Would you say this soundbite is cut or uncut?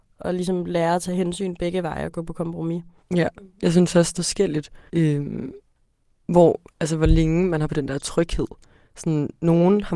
cut